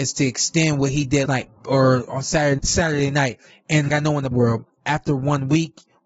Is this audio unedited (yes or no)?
no